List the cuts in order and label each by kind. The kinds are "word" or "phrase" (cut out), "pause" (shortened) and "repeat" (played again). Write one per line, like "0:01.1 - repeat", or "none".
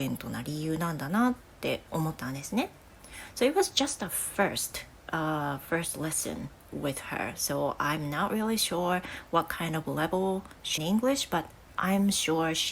0:01.9 - pause
0:10.8 - phrase